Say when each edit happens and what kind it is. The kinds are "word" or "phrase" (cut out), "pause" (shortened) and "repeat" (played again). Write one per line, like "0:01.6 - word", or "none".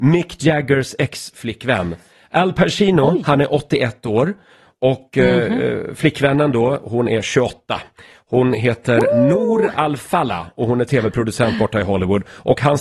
none